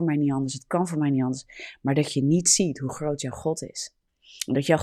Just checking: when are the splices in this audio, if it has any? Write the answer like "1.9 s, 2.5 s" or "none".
none